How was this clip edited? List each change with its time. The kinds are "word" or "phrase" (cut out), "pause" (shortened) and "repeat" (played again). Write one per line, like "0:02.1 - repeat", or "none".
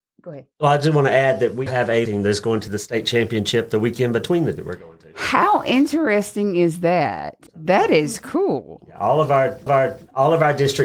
0:01.7 - word
0:02.1 - phrase
0:04.6 - word
0:07.5 - pause
0:09.7 - repeat